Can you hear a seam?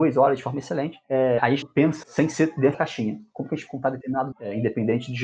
yes; 5 cuts; at 1.6 s, 2.0 s, 2.7 s, 3.7 s, 4.3 s

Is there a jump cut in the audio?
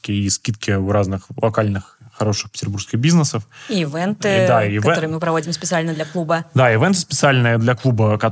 no; 0 cuts

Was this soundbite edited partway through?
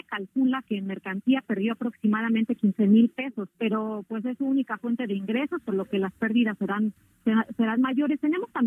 yes; 1 cut; at 3.5 s

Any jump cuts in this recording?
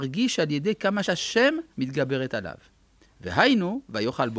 yes; 2 cuts; at 1.0 s, 1.7 s

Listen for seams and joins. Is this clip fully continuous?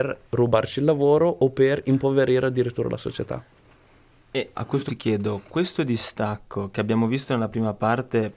no; 2 cuts; at 4.6 s, 4.9 s

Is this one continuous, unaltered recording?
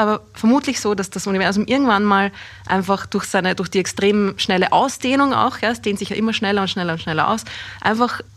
yes; 0 cuts

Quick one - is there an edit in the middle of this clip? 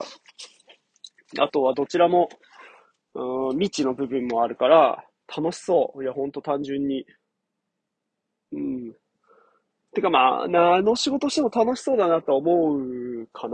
no; 0 cuts

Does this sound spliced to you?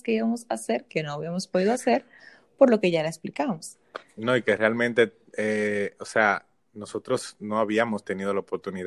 no; 0 cuts

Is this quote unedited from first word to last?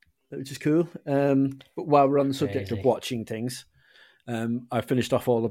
yes; 0 cuts

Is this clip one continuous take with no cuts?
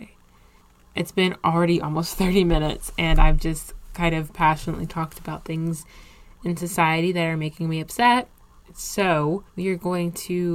no; 1 cut; at 9.5 s

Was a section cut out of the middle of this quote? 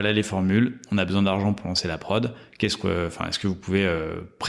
no; 0 cuts

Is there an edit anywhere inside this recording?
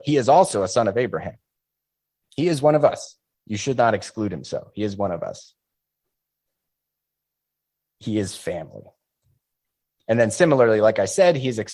no; 0 cuts

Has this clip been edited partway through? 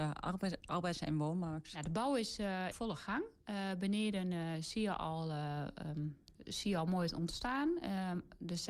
yes; 2 cuts; at 2.7 s, 6.3 s

